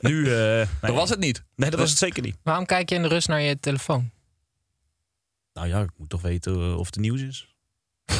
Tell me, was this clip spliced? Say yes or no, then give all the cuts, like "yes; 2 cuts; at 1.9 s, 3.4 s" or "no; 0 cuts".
no; 0 cuts